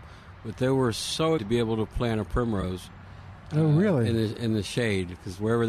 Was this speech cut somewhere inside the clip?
yes; 1 cut; at 1.4 s

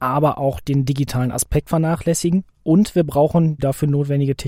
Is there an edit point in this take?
yes; 2 cuts; at 1.7 s, 3.6 s

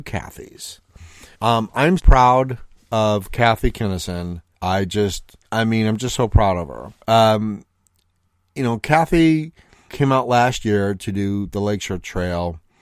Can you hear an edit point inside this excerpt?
yes; 6 cuts; at 1.3 s, 2.0 s, 4.5 s, 5.4 s, 7.0 s, 9.9 s

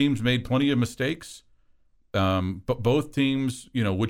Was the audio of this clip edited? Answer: no; 0 cuts

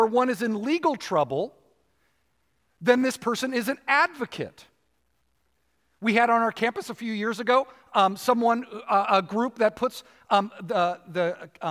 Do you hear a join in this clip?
no; 0 cuts

